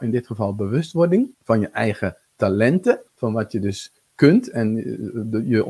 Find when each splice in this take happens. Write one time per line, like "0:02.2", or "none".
0:01.3
0:03.1